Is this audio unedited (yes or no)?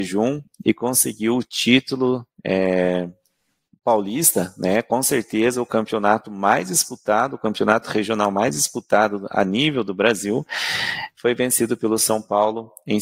yes